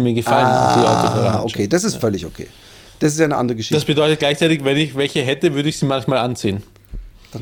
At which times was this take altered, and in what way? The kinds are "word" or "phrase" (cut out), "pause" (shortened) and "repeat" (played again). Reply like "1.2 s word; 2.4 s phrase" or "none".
none